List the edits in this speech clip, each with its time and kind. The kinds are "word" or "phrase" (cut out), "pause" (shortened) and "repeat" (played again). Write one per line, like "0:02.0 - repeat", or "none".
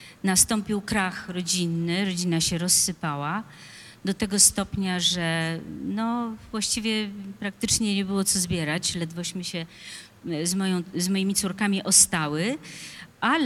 none

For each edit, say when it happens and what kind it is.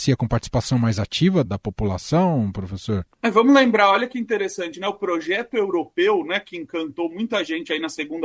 0:01.5 - word
0:03.1 - pause

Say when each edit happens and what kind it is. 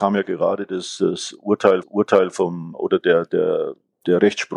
0:01.8 - repeat

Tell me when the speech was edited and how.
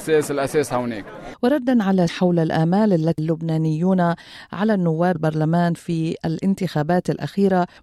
0:02.1 - word
0:03.2 - word
0:05.1 - phrase

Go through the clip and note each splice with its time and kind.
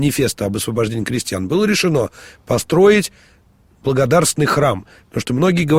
none

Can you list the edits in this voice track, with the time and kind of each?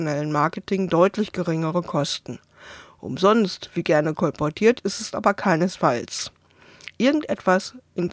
none

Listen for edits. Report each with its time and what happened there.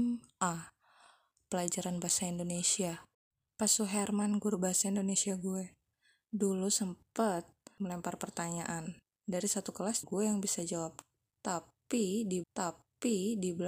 0:03.1 - pause
0:07.8 - word
0:09.0 - pause
0:10.0 - word
0:12.4 - repeat

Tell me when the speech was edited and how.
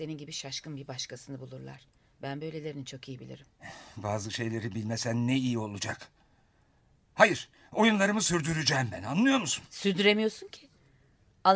none

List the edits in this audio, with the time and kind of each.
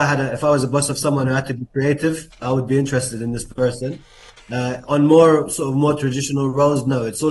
0:02.4 - word

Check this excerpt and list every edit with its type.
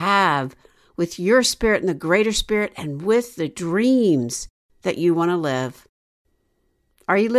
none

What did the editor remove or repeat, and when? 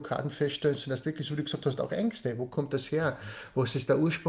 none

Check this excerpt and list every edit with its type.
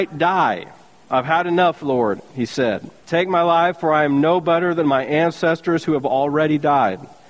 0:03.0 - pause

